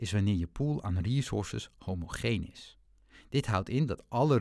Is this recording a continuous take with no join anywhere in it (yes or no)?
yes